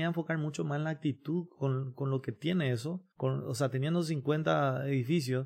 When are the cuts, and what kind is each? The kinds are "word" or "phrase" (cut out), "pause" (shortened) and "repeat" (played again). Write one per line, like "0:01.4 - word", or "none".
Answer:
0:03.1 - pause